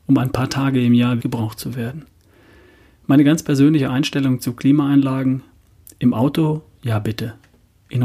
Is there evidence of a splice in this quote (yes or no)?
yes